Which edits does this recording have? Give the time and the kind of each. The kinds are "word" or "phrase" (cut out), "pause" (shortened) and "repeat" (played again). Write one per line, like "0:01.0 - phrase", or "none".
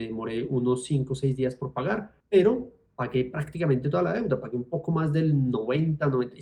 0:02.2 - pause